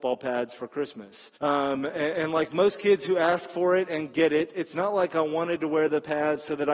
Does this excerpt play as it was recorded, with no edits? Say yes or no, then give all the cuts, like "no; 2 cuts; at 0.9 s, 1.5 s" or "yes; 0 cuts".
no; 1 cut; at 1.4 s